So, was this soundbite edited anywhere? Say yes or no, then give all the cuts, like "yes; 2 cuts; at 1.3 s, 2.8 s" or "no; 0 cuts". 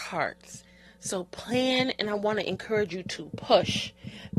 no; 0 cuts